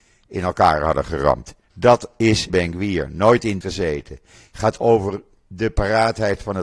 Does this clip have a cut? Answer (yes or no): yes